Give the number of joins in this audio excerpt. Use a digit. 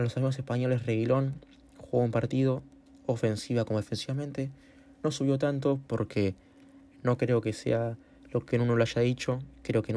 0